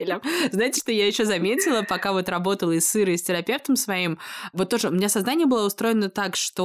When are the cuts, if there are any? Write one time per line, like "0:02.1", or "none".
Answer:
none